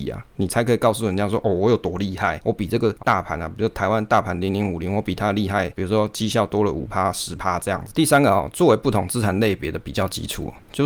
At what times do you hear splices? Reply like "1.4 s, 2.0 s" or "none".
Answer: 3.0 s